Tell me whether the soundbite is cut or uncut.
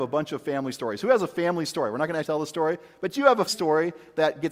cut